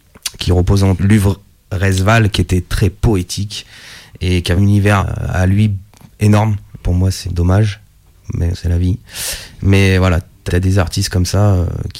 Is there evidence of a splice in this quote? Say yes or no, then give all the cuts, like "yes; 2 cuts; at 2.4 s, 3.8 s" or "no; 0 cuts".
yes; 7 cuts; at 1.0 s, 4.6 s, 5.0 s, 6.8 s, 7.2 s, 8.5 s, 10.5 s